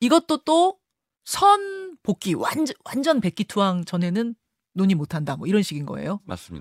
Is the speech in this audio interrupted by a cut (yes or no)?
no